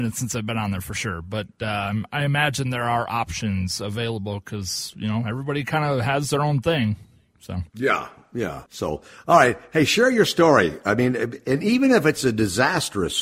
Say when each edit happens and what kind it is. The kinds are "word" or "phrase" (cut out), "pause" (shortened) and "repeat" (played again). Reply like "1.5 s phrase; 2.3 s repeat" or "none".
7.7 s pause; 8.7 s pause